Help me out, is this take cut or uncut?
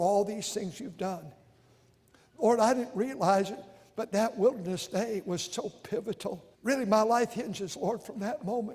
cut